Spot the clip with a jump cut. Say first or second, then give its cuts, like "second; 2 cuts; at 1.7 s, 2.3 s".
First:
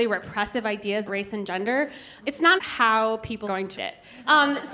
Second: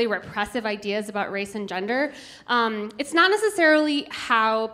first; 5 cuts; at 1.1 s, 2.2 s, 2.6 s, 3.4 s, 3.8 s